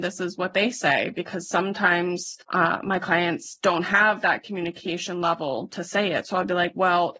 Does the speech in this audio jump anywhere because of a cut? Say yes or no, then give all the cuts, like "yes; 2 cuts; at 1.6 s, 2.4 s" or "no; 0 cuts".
yes; 1 cut; at 2.4 s